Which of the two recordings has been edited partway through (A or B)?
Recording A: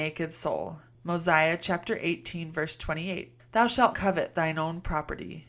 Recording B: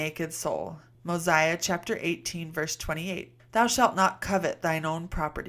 A